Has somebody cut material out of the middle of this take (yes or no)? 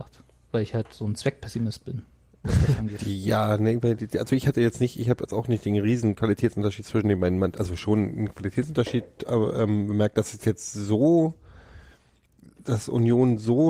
no